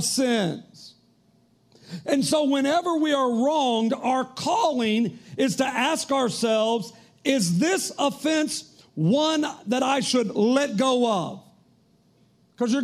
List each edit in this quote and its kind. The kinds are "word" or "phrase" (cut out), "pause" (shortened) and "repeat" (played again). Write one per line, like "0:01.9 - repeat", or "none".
none